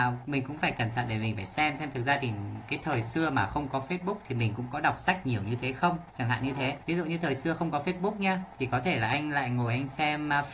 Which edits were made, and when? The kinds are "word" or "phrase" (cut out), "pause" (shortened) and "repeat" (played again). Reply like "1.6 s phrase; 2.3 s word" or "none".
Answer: 6.1 s pause; 6.8 s pause; 8.5 s pause